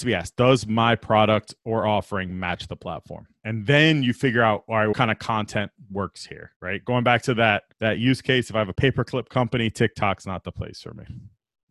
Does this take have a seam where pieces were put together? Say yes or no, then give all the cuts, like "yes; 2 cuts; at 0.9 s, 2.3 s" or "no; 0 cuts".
yes; 4 cuts; at 3.4 s, 4.9 s, 6.5 s, 7.7 s